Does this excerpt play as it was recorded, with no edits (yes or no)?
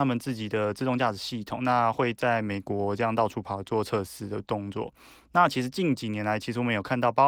yes